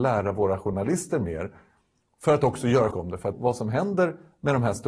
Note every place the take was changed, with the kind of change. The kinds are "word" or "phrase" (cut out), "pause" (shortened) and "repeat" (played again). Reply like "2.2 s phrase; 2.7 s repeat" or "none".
2.9 s word; 3.3 s word